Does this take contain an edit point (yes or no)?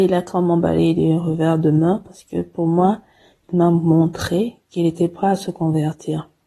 no